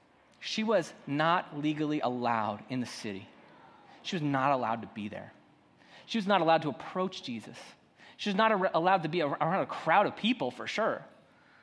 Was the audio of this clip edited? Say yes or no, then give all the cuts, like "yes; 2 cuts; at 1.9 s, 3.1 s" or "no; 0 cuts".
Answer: no; 0 cuts